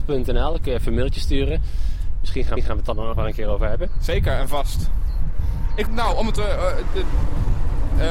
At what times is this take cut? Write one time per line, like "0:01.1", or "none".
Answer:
0:02.6
0:03.1
0:05.9